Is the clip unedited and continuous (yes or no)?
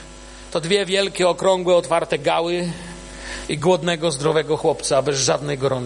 yes